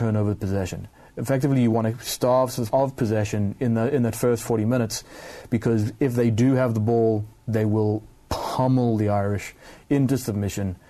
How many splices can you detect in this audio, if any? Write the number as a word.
one